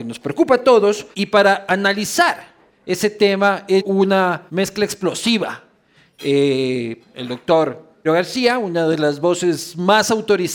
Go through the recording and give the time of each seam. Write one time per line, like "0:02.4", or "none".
0:01.1
0:02.6
0:03.8
0:04.5
0:07.0
0:08.0

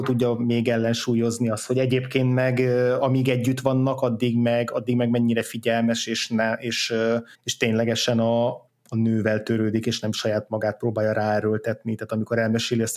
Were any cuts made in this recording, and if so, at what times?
0:07.3
0:08.7

